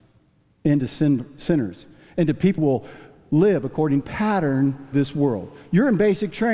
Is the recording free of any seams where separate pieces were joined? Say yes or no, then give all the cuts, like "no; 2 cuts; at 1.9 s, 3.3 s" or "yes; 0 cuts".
no; 3 cuts; at 2.6 s, 4.0 s, 4.9 s